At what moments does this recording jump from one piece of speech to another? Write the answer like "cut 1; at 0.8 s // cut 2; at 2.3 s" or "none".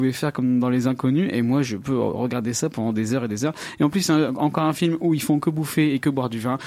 none